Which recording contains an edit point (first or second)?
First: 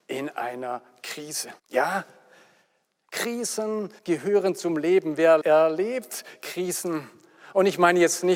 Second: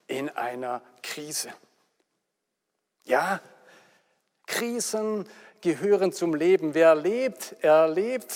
first